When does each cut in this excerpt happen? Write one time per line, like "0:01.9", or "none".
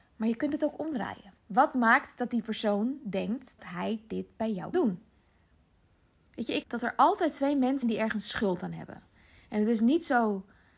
0:01.4
0:03.6
0:04.7
0:06.6
0:07.8